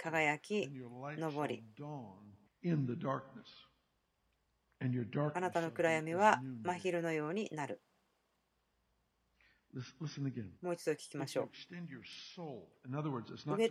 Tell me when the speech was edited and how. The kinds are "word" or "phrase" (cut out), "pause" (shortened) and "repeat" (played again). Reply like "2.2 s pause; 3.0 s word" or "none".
2.5 s pause; 10.6 s pause